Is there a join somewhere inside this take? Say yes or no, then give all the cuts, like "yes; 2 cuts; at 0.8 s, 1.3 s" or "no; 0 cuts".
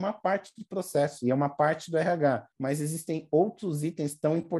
yes; 1 cut; at 2.5 s